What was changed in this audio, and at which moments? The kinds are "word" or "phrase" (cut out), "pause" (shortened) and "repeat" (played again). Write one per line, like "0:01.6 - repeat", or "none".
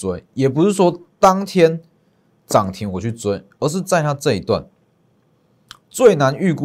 none